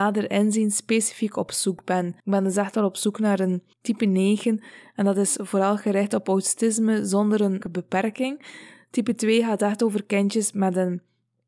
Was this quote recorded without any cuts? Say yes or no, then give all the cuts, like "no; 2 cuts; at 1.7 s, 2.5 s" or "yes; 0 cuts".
no; 3 cuts; at 2.2 s, 3.7 s, 7.6 s